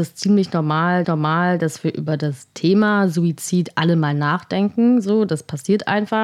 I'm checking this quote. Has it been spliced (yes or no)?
yes